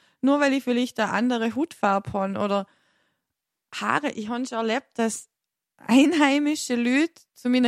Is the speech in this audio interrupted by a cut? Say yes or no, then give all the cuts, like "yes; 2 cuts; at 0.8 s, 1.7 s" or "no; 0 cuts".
no; 0 cuts